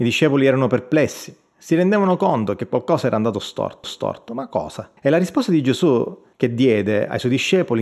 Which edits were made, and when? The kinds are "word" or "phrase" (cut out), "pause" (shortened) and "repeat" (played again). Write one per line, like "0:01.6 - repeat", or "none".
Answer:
0:03.8 - repeat
0:05.0 - pause
0:06.3 - pause